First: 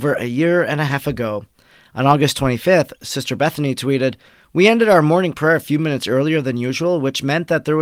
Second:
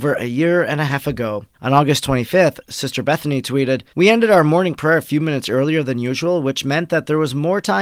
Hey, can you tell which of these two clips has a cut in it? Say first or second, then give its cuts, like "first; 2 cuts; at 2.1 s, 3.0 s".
second; 2 cuts; at 1.5 s, 3.9 s